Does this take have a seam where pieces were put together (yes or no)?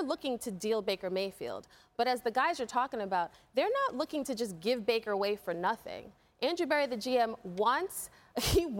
no